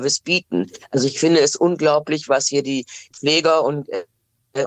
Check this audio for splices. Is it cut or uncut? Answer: uncut